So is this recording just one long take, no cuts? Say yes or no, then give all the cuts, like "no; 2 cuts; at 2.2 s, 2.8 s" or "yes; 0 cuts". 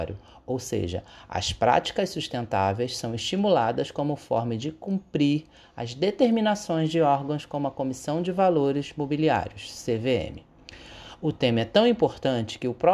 yes; 0 cuts